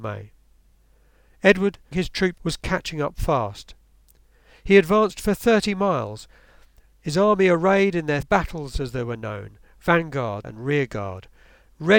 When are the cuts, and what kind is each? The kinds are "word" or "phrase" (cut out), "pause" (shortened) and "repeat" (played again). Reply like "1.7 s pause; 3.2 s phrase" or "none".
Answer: 1.9 s word; 2.4 s word; 8.2 s word; 10.4 s word